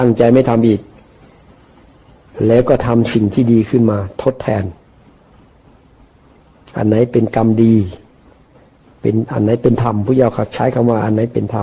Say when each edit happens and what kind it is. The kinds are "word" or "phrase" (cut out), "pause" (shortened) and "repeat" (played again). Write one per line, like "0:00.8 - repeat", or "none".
none